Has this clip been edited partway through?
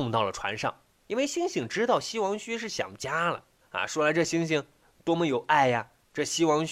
no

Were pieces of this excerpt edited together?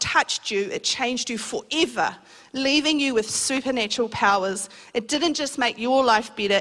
no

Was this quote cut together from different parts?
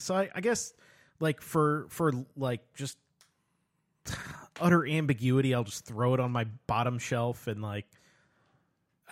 no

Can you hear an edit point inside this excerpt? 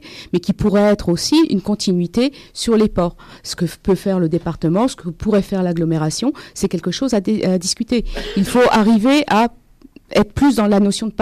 no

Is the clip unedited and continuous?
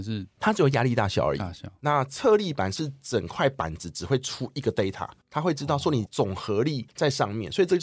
yes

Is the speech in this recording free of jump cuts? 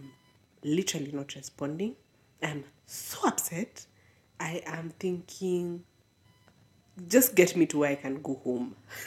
yes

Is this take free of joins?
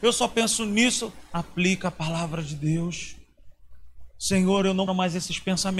no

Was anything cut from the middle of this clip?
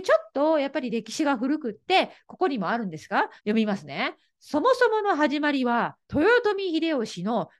yes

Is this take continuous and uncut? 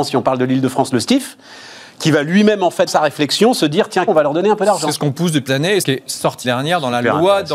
no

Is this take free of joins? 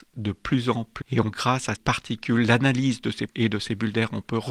no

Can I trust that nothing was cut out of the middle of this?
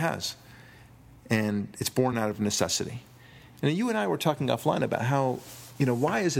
yes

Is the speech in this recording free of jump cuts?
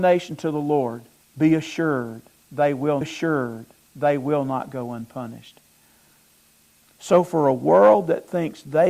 no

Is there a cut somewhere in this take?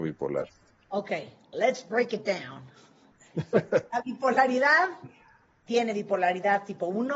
no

